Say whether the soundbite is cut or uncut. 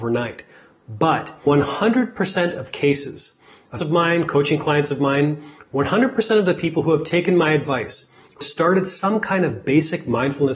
cut